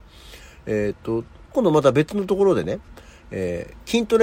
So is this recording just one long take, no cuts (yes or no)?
yes